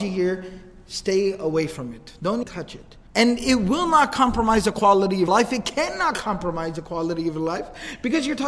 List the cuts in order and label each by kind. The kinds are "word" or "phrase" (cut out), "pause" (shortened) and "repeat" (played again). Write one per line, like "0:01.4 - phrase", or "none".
0:02.4 - word
0:03.1 - pause
0:05.3 - word